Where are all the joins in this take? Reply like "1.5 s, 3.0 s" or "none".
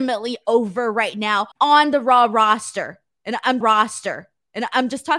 1.5 s, 3.6 s